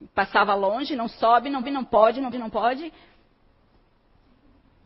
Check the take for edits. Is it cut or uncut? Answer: cut